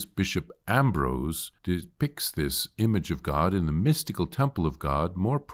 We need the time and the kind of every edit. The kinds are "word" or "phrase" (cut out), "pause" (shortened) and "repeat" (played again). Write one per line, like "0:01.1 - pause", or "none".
0:01.6 - pause